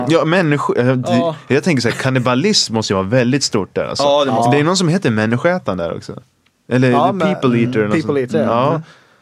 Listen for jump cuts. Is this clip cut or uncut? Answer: uncut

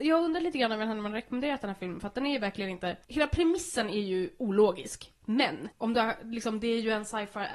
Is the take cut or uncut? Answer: cut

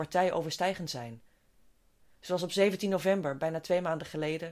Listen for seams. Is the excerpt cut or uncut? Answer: uncut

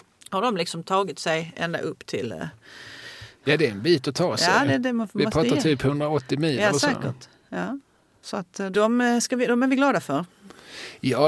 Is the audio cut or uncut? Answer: uncut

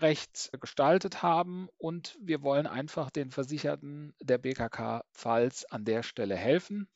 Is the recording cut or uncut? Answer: uncut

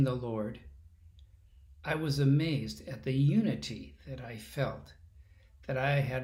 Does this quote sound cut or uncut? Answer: uncut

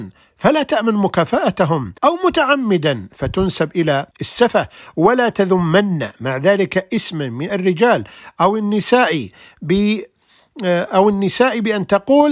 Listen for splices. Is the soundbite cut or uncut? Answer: cut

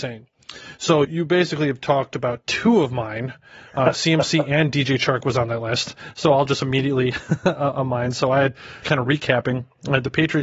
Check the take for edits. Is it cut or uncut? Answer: cut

